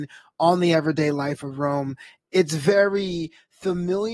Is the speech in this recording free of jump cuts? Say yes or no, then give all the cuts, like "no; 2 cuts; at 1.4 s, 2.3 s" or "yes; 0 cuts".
yes; 0 cuts